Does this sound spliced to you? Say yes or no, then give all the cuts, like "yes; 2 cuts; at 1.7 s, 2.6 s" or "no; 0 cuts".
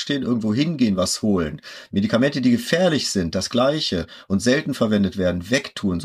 no; 0 cuts